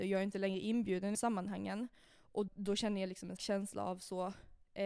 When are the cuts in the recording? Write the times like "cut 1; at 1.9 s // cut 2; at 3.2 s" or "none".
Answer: cut 1; at 1.1 s // cut 2; at 2.5 s // cut 3; at 3.4 s